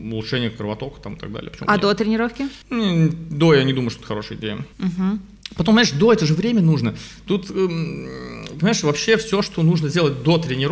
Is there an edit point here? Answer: yes; 2 cuts; at 2.6 s, 4.7 s

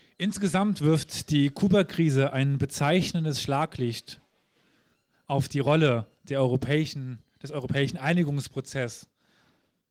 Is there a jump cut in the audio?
no; 0 cuts

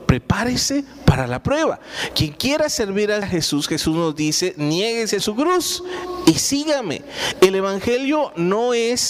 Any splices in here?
yes; 2 cuts; at 3.2 s, 5.2 s

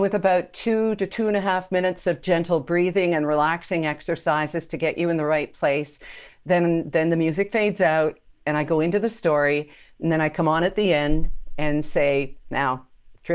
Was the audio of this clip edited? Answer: no; 0 cuts

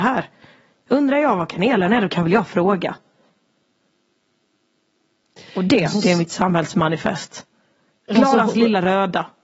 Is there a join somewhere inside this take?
no; 0 cuts

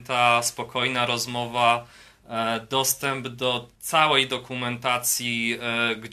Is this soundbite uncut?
no; 1 cut; at 3.8 s

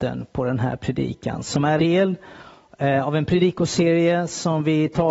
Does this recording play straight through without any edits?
no; 1 cut; at 1.8 s

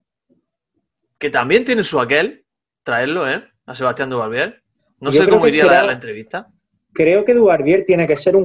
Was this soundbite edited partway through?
no; 0 cuts

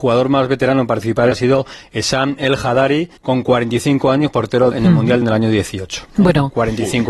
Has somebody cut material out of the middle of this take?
yes; 4 cuts; at 1.3 s, 3.2 s, 4.7 s, 5.2 s

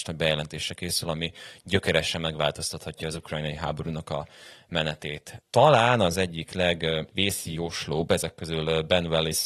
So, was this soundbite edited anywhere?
no; 0 cuts

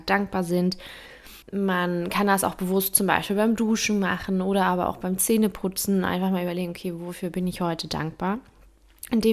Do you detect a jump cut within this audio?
yes; 1 cut; at 1.4 s

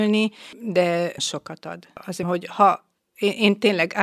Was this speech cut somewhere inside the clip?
yes; 2 cuts; at 1.2 s, 2.2 s

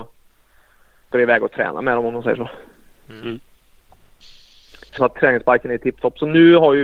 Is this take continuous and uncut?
no; 2 cuts; at 1.1 s, 5.0 s

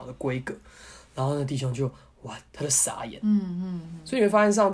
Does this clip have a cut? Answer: yes; 1 cut; at 2.5 s

